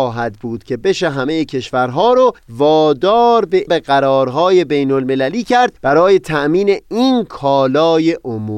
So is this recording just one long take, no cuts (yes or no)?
no